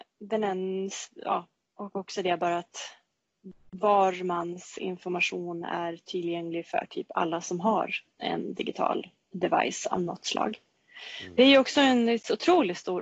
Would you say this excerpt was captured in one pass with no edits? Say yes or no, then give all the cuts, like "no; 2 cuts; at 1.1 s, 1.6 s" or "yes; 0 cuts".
yes; 0 cuts